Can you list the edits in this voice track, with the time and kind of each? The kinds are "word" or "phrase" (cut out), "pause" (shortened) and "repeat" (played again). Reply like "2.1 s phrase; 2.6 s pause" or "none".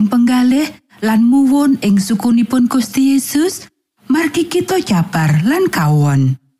none